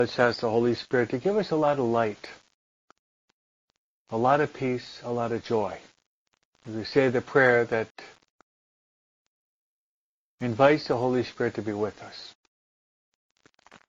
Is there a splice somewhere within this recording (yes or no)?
yes